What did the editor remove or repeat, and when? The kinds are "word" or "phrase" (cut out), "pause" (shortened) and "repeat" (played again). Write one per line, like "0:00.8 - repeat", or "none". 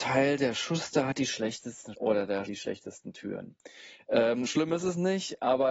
0:01.9 - word
0:02.4 - word
0:04.4 - word